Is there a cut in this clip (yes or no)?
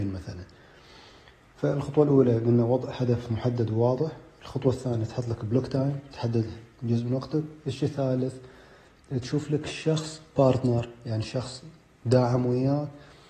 no